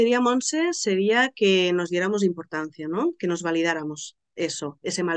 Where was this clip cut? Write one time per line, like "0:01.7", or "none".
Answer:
none

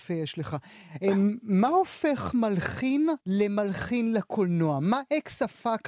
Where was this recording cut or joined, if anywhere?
0:03.2

